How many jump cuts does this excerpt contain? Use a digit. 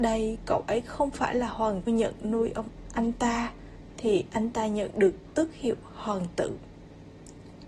1